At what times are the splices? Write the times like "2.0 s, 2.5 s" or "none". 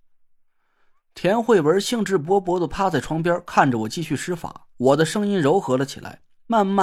4.7 s